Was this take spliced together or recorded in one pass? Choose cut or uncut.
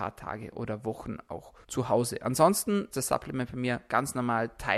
cut